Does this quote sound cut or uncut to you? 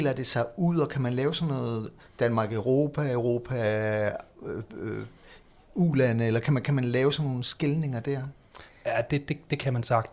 uncut